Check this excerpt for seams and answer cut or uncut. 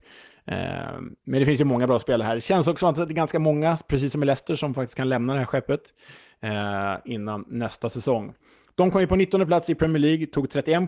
uncut